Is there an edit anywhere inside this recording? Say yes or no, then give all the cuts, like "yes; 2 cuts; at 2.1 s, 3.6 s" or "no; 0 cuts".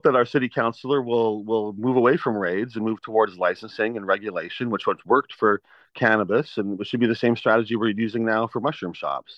no; 0 cuts